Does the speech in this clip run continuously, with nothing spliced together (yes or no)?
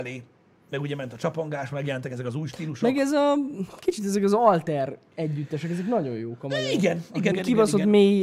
no